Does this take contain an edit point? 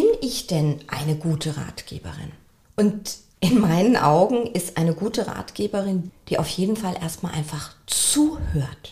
yes; 1 cut; at 6.1 s

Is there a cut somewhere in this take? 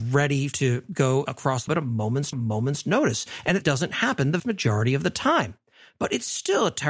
yes; 4 cuts; at 1.7 s, 2.3 s, 3.6 s, 4.4 s

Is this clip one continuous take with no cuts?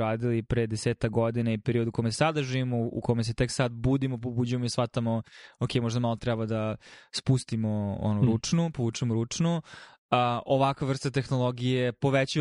yes; 0 cuts

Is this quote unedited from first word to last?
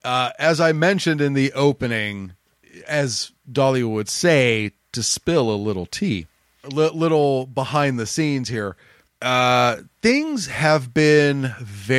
no; 2 cuts; at 6.6 s, 9.1 s

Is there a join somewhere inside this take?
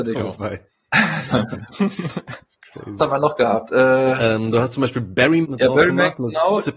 yes; 2 cuts; at 3.0 s, 5.4 s

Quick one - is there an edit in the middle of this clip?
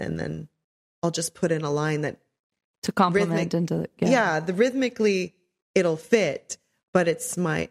no; 0 cuts

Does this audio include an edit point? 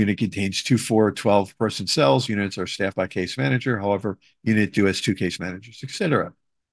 yes; 1 cut; at 2.3 s

